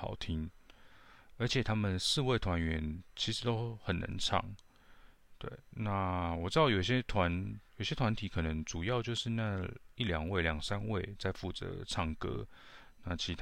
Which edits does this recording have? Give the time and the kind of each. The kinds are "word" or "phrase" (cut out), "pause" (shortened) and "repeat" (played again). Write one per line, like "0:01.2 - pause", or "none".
0:07.7 - pause